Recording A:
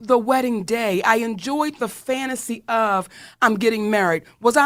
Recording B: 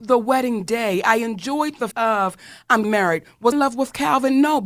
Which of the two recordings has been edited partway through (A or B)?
B